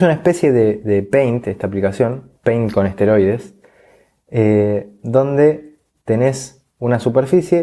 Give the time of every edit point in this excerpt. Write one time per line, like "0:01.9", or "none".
none

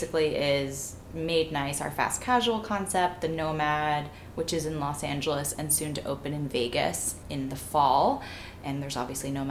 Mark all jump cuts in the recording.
0:07.2

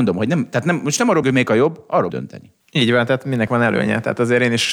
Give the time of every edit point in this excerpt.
0:01.2
0:02.1
0:02.6
0:03.5

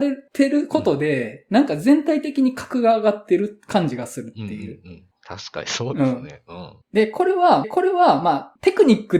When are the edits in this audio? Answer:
0:06.8
0:07.6

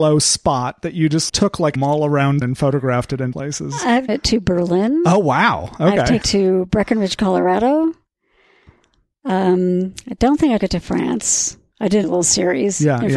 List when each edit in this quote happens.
0:01.3
0:01.8
0:02.4
0:03.3
0:04.1
0:06.2
0:10.6
0:12.0

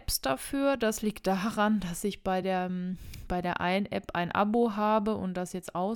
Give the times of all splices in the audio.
none

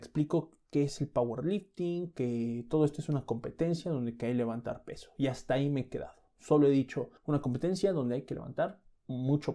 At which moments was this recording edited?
0:07.2

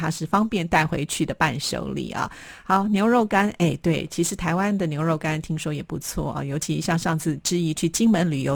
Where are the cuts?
none

